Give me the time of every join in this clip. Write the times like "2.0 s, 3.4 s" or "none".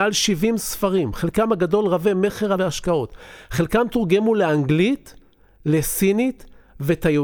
2.6 s